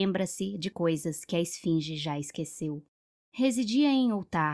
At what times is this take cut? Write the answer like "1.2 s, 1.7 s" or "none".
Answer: 3.0 s